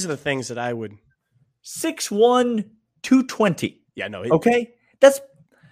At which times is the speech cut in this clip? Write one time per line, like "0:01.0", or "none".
0:03.9